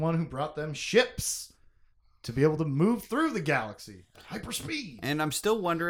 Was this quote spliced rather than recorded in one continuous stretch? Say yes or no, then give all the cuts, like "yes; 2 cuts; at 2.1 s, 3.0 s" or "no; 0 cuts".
no; 0 cuts